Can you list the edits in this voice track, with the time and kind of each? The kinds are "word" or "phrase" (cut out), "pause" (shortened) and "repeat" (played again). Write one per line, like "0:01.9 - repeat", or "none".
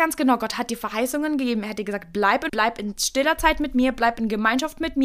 0:02.5 - phrase